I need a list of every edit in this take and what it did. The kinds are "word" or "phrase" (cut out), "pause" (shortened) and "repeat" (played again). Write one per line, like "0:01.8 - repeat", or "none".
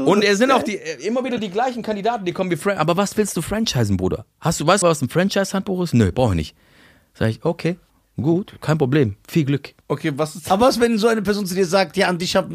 0:04.8 - word
0:07.9 - pause
0:09.8 - pause